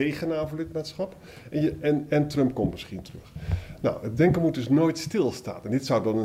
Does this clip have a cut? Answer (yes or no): no